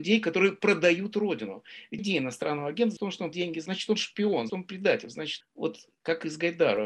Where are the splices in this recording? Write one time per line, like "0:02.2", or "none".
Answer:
0:02.0
0:03.0
0:03.3
0:03.7
0:04.5
0:05.4